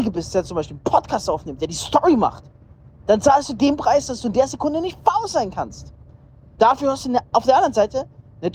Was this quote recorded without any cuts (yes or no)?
yes